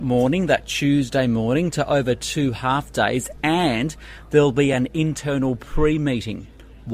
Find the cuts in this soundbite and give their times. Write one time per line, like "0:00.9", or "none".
none